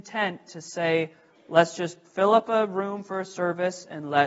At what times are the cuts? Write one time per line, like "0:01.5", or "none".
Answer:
none